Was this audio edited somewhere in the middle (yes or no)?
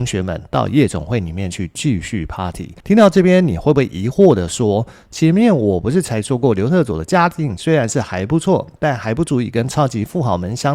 yes